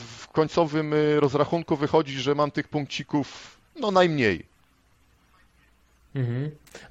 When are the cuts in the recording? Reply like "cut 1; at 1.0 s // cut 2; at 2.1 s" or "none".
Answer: none

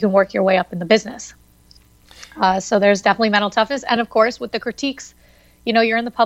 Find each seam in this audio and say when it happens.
none

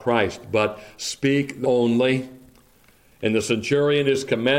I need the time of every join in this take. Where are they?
cut 1; at 1.6 s

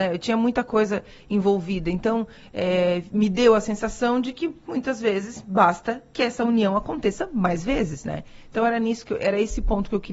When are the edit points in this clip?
none

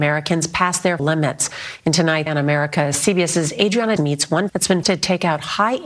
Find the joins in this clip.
cut 1; at 1.0 s // cut 2; at 2.3 s // cut 3; at 4.0 s // cut 4; at 4.5 s // cut 5; at 4.8 s

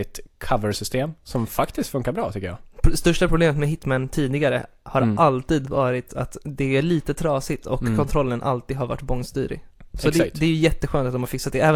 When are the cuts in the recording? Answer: none

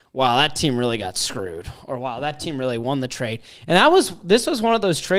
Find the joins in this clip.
none

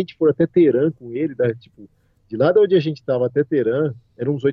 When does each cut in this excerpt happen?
none

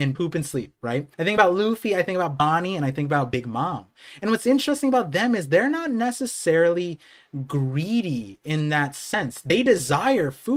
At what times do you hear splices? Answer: cut 1; at 1.1 s

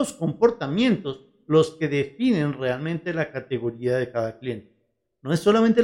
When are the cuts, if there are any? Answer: none

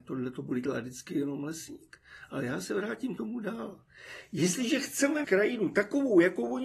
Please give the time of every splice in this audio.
cut 1; at 3.2 s // cut 2; at 5.2 s

